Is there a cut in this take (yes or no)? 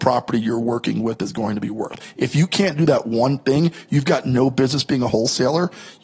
no